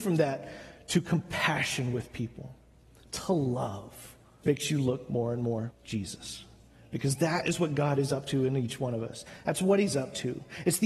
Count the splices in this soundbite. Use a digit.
2